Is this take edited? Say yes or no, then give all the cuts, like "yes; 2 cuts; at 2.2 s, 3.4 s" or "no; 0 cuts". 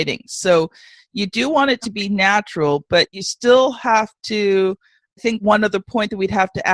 no; 0 cuts